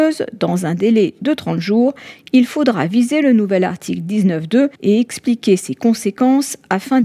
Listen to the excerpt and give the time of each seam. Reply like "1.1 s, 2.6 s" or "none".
4.7 s